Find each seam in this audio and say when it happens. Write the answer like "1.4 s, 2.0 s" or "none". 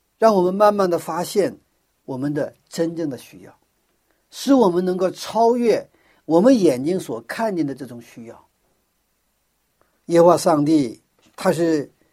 none